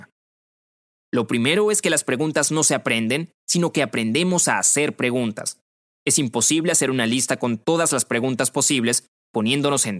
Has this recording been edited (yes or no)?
no